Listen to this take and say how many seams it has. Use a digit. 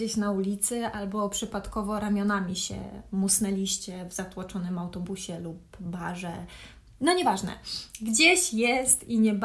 0